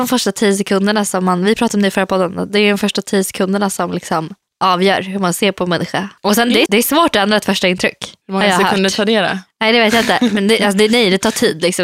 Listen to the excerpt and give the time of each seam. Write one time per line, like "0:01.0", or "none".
0:04.4
0:06.2
0:06.7
0:08.2